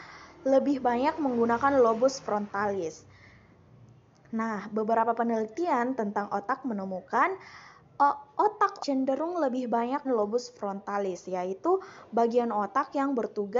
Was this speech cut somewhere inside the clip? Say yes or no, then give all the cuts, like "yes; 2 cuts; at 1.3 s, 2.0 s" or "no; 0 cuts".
yes; 2 cuts; at 8.8 s, 10.0 s